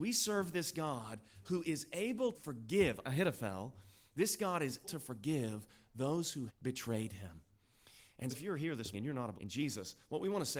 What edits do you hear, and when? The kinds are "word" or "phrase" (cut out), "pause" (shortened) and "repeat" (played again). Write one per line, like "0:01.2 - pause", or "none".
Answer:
0:02.3 - word
0:03.0 - word
0:04.8 - word
0:06.5 - word
0:08.3 - word
0:08.9 - word
0:09.4 - word